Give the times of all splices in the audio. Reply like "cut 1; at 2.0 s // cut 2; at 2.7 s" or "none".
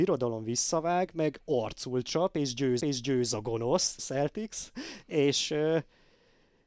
cut 1; at 2.8 s // cut 2; at 4.0 s

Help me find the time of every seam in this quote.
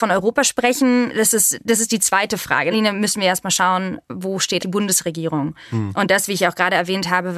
cut 1; at 2.7 s // cut 2; at 4.6 s

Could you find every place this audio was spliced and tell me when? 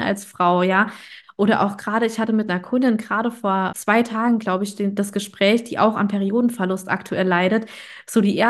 cut 1; at 3.7 s

